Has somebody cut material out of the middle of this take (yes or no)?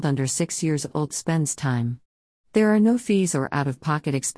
no